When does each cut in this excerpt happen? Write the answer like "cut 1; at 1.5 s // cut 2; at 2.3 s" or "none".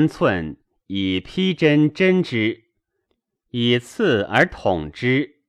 none